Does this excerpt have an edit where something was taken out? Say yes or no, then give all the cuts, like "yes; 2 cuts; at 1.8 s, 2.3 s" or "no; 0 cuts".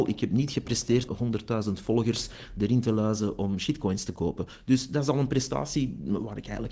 yes; 1 cut; at 1.1 s